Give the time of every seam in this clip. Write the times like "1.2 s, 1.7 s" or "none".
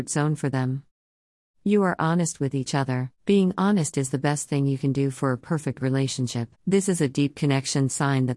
3.2 s, 6.5 s